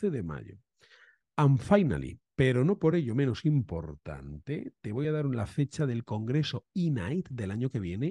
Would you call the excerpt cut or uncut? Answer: uncut